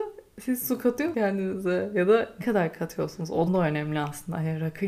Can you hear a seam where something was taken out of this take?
yes; 3 cuts; at 1.1 s, 2.4 s, 3.5 s

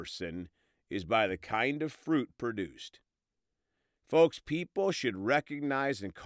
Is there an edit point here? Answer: no; 0 cuts

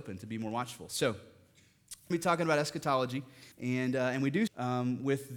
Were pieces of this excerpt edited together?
yes; 3 cuts; at 2.1 s, 3.5 s, 4.5 s

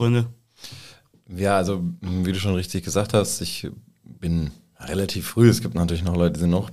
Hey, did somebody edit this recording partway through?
yes; 1 cut; at 4.2 s

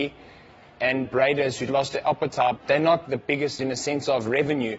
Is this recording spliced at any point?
yes; 5 cuts; at 1.0 s, 1.7 s, 2.6 s, 3.0 s, 3.6 s

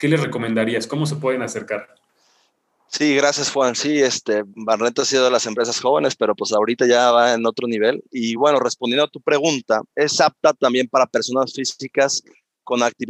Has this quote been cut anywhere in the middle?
no; 0 cuts

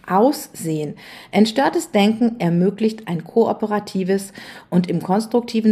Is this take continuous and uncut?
yes; 0 cuts

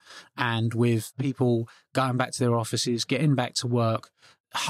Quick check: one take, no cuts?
yes; 0 cuts

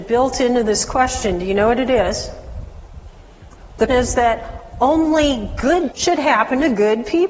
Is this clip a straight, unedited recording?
no; 2 cuts; at 3.9 s, 5.9 s

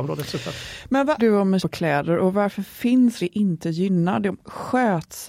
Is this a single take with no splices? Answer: no; 3 cuts; at 1.2 s, 1.6 s, 3.2 s

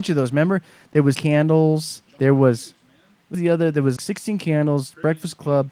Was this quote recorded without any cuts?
no; 4 cuts; at 1.1 s, 2.1 s, 3.3 s, 4.0 s

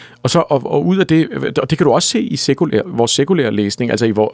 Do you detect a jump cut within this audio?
no; 0 cuts

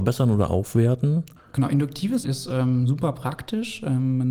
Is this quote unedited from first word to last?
no; 1 cut; at 2.2 s

